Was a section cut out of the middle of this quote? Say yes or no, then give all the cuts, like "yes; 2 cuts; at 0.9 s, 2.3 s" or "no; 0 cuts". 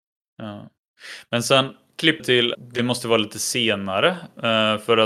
yes; 2 cuts; at 2.2 s, 2.5 s